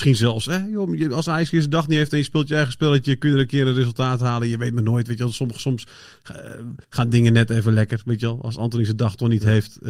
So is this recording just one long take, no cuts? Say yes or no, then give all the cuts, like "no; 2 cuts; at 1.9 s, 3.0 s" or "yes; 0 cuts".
no; 1 cut; at 6.8 s